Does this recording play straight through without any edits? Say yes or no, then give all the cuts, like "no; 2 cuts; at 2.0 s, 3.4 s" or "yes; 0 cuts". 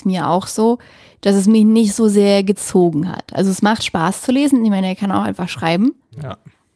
yes; 0 cuts